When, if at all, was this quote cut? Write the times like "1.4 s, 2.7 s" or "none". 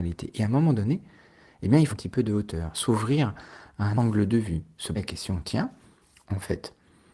1.9 s, 3.9 s, 4.9 s

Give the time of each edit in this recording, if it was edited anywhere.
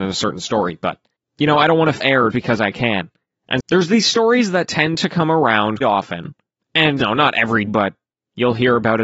2.0 s, 2.3 s, 3.6 s, 5.8 s, 7.0 s, 7.7 s

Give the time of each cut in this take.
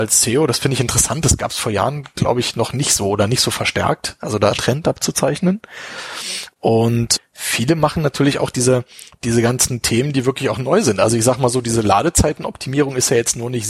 4.5 s

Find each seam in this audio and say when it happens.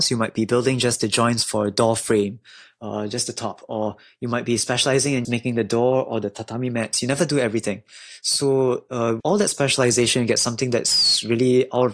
5.2 s, 9.2 s

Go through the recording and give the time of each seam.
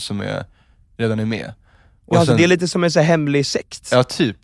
none

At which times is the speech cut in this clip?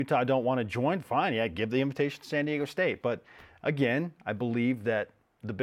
none

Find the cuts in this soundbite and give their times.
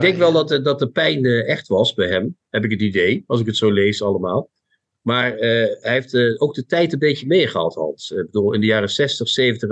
none

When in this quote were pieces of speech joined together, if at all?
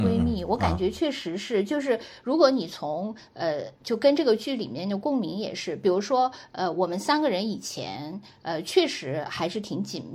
3.8 s

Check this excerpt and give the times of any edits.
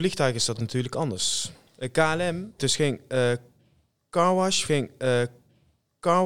2.6 s, 4.7 s

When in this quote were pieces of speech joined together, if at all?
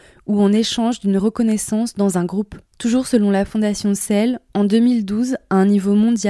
2.7 s

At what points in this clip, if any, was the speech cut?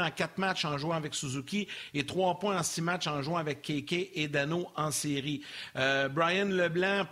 none

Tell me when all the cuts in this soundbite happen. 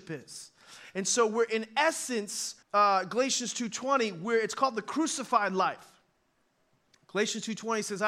2.6 s

